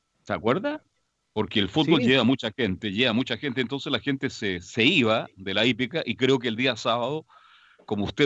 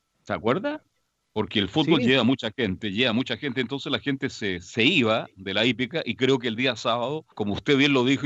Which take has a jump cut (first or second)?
second